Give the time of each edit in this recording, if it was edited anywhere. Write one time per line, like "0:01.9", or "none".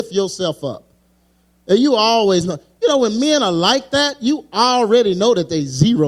none

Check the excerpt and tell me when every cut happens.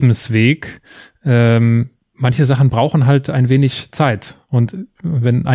0:02.0

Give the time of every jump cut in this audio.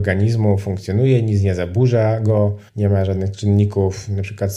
0:02.7

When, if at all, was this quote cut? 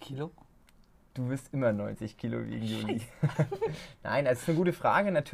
none

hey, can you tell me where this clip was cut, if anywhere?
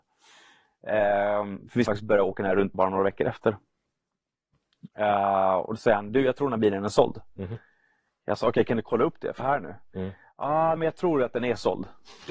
0:01.9
0:02.7
0:09.4
0:10.8

